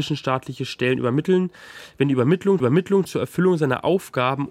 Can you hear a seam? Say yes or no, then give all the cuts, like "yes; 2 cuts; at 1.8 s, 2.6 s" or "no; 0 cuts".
yes; 1 cut; at 2.6 s